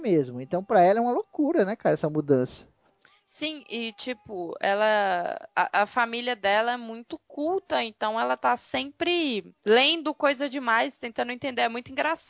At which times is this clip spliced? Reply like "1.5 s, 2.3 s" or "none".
5.5 s, 9.6 s